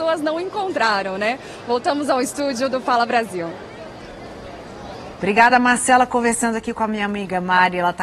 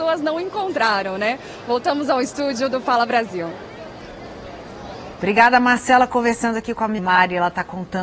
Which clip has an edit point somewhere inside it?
second; 1 cut; at 7.0 s

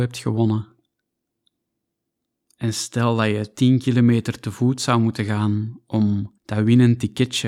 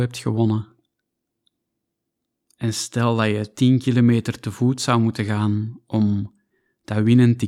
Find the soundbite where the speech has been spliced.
first; 1 cut; at 6.4 s

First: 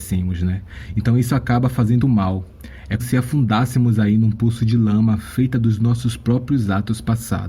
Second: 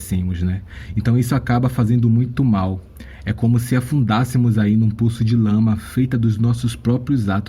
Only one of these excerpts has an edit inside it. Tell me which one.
first; 2 cuts; at 2.0 s, 3.0 s

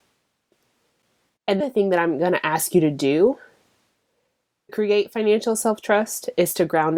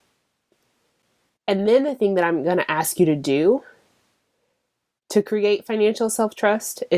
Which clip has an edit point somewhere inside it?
first; 2 cuts; at 1.6 s, 4.7 s

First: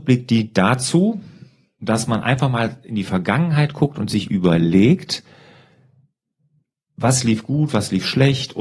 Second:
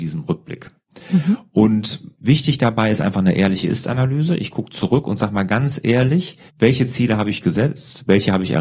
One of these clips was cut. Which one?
second; 2 cuts; at 2.1 s, 6.5 s

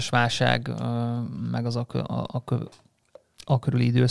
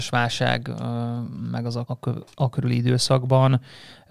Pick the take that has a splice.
second; 2 cuts; at 1.9 s, 2.3 s

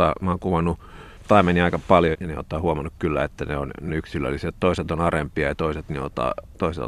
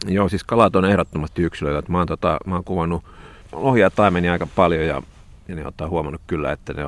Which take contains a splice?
first; 3 cuts; at 1.2 s, 2.1 s, 3.9 s

